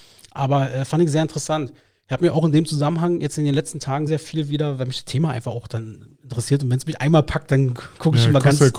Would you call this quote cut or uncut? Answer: cut